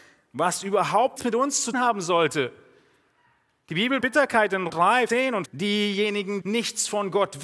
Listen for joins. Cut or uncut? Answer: cut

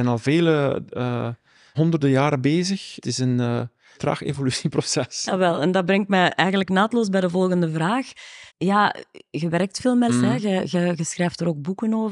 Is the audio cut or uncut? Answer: cut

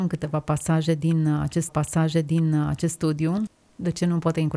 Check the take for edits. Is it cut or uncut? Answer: cut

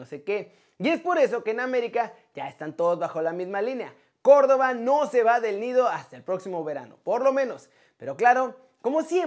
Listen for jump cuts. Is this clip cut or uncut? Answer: uncut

